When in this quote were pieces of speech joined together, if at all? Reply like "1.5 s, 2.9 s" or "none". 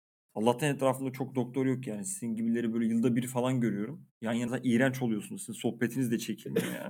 4.5 s